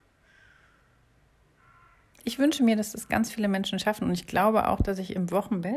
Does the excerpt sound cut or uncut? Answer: uncut